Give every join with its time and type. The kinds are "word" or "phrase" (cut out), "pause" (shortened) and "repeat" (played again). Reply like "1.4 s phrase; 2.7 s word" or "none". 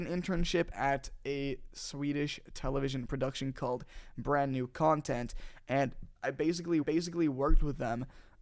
3.5 s word; 6.2 s pause; 6.8 s repeat

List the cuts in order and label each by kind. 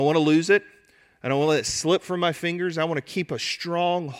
none

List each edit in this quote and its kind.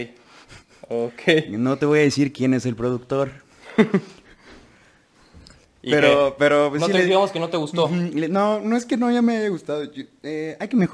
none

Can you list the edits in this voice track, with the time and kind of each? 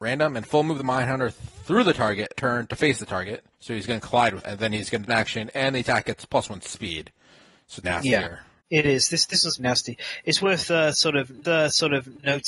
2.3 s word; 3.5 s pause; 4.4 s word; 5.1 s phrase; 7.8 s word; 8.6 s pause; 9.6 s word; 11.4 s repeat

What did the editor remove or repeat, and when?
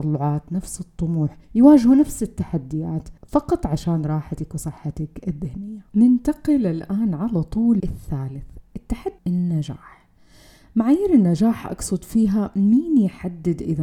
1.4 s pause; 3.2 s pause; 5.9 s pause; 7.8 s word; 9.2 s phrase

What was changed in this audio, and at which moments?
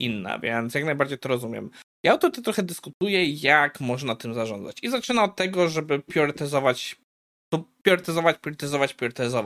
none

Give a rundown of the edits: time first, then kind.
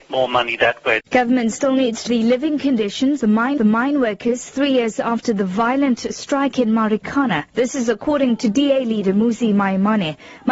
1.1 s pause; 2.1 s phrase; 3.2 s word; 3.6 s repeat; 7.5 s pause

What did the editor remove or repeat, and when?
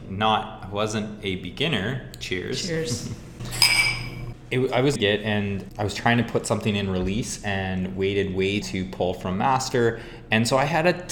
5.0 s phrase; 8.6 s phrase

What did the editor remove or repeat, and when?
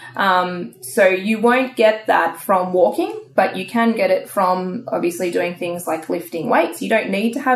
none

